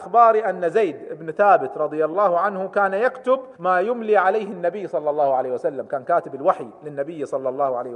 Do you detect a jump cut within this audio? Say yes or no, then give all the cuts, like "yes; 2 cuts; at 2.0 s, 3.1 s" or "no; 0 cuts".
yes; 1 cut; at 3.5 s